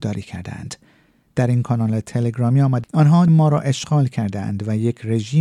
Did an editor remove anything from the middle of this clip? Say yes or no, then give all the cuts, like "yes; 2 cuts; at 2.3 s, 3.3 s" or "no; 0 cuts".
yes; 2 cuts; at 2.8 s, 3.3 s